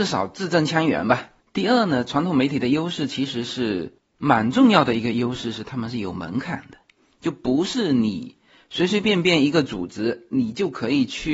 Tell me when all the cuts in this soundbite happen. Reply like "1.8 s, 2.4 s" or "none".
none